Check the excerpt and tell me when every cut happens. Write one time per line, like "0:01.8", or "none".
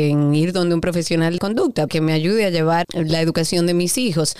0:01.4
0:01.9
0:02.8